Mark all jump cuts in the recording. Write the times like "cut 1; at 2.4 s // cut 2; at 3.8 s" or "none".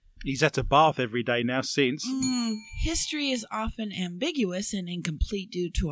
none